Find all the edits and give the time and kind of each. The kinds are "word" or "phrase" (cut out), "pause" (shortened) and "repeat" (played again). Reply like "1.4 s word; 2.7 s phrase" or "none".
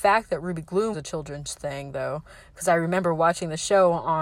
0.9 s word